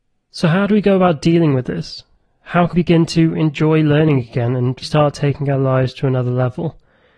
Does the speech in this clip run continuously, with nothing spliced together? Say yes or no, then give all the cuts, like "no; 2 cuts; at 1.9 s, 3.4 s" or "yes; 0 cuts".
no; 2 cuts; at 2.7 s, 4.8 s